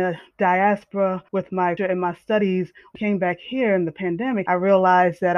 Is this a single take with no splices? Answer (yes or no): no